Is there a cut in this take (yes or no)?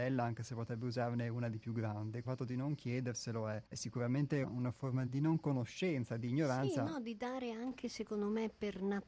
yes